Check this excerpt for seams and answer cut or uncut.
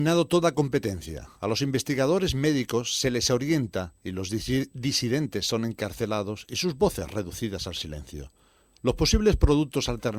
uncut